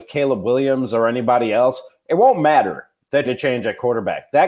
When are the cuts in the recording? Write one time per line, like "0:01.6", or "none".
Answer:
0:03.2